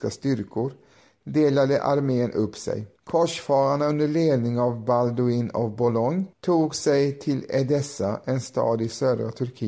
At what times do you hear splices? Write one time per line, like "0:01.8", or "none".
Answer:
0:03.0
0:06.3